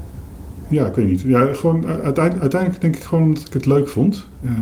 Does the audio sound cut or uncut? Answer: uncut